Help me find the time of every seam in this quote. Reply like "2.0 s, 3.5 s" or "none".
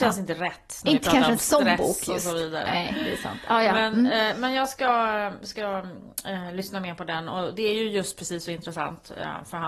none